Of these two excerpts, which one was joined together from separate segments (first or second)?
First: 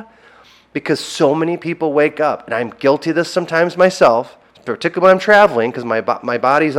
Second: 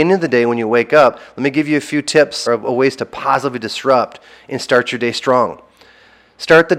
second